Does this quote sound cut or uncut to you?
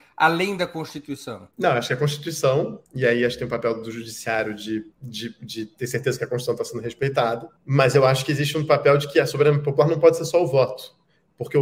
cut